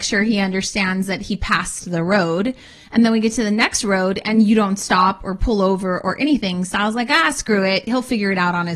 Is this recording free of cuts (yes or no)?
yes